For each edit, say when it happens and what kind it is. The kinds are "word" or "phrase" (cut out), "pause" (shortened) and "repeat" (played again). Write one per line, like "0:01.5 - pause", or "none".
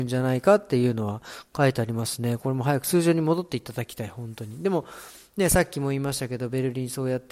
none